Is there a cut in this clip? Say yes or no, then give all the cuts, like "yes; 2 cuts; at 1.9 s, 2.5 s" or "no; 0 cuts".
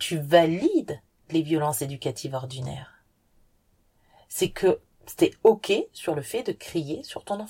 no; 0 cuts